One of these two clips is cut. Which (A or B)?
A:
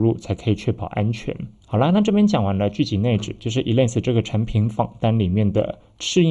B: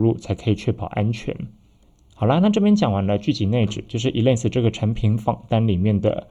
A